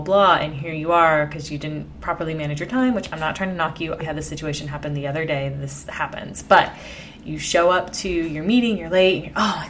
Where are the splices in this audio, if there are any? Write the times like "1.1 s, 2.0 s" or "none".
4.0 s